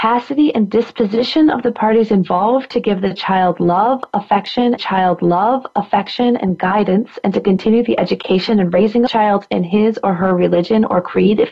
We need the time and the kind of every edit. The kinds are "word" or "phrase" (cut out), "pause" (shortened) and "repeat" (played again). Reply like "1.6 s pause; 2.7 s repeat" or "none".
4.8 s repeat; 9.1 s phrase